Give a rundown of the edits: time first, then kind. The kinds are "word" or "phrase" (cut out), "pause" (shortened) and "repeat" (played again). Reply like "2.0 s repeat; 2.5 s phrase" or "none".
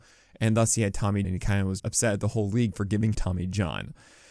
1.2 s word; 1.8 s word; 3.1 s word